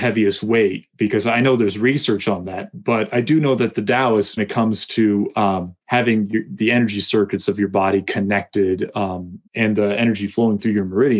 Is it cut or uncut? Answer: cut